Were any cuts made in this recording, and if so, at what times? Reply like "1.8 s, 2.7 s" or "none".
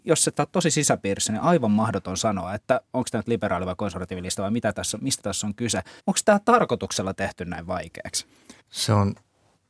6.0 s, 8.6 s